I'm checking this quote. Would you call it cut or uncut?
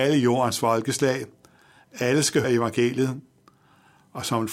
cut